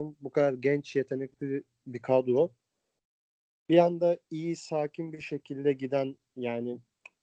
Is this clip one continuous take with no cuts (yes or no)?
yes